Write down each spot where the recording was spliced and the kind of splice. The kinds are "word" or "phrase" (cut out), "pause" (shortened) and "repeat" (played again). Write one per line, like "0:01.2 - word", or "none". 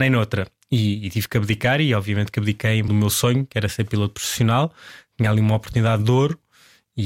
0:02.9 - word

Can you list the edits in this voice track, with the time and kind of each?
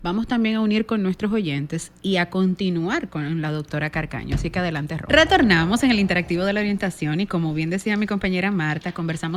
none

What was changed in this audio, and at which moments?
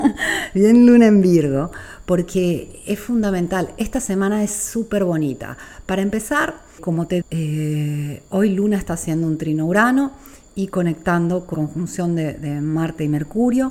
0:06.8 - word
0:07.2 - word
0:11.5 - word

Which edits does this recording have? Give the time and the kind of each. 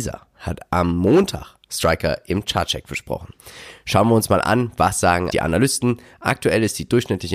0:05.3 - word

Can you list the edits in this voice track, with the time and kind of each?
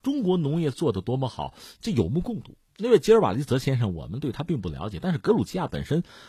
0:02.7 - pause

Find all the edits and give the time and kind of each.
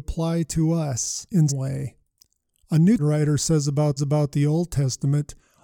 0:01.5 - word
0:03.0 - word
0:04.0 - repeat

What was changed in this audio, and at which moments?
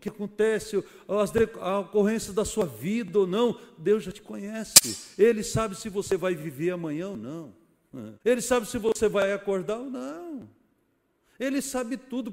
0:08.2 - pause

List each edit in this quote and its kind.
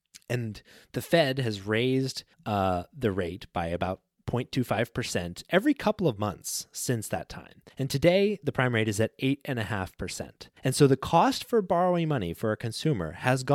0:02.3 - pause
0:04.2 - word
0:07.7 - pause
0:10.6 - pause

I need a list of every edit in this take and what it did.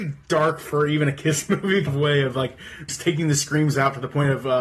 0:01.9 - word
0:02.9 - word

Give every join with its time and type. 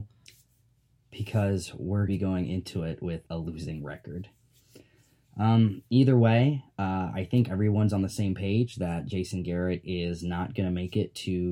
0:02.1 - phrase
0:03.3 - pause

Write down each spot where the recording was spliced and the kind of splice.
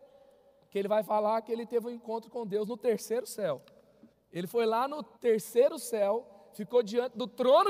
0:04.1 - pause
0:05.1 - pause

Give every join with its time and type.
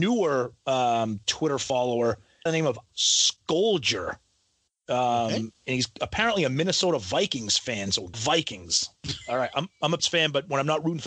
0:02.5 - phrase
0:02.9 - word
0:05.6 - pause
0:08.1 - word
0:10.0 - word

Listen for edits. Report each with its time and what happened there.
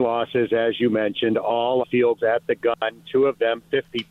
0:01.8 - word
0:02.2 - word

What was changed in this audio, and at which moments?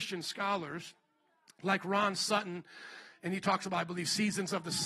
none

